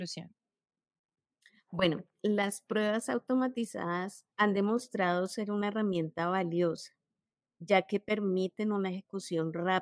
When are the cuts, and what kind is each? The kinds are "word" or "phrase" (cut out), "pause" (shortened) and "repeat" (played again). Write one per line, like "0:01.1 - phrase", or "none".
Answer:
0:04.3 - pause